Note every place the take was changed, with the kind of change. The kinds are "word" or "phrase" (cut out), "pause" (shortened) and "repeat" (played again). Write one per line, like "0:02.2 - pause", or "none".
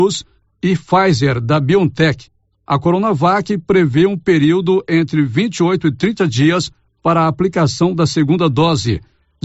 none

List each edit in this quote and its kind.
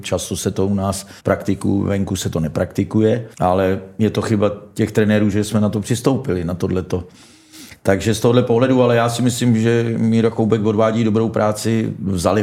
0:01.2 - pause
0:03.3 - pause

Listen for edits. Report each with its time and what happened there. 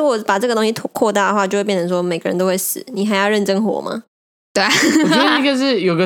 none

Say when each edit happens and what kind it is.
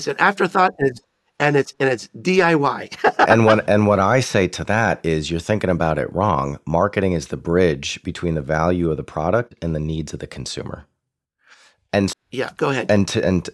0:03.3 - word
0:12.1 - word

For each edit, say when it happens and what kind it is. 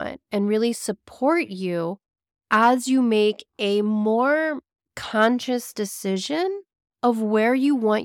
none

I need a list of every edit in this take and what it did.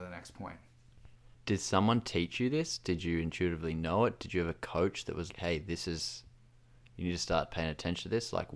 0:01.3 - word
0:05.3 - word

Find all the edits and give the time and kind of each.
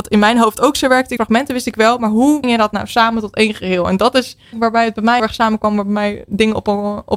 0:01.2 - phrase
0:02.4 - word
0:04.5 - phrase
0:05.2 - word

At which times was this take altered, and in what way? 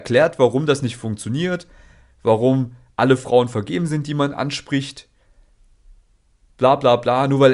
none

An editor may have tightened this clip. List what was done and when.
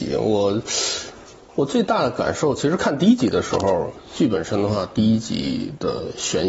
none

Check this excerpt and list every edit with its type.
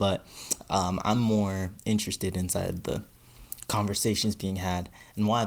none

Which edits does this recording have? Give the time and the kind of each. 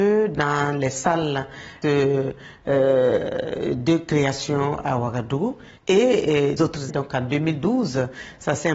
0:01.8 - phrase
0:05.8 - pause
0:06.6 - word
0:06.9 - word

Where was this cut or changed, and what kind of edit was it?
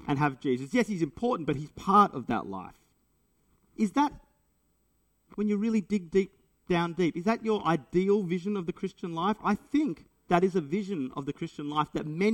0:10.3 - word

